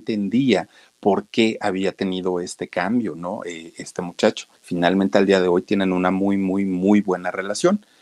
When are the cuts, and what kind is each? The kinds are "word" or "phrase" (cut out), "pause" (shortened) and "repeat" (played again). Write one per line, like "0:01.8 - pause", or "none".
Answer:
0:04.6 - pause